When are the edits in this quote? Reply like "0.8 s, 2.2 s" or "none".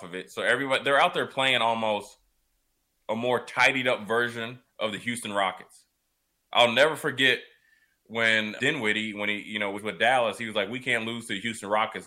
8.6 s, 9.8 s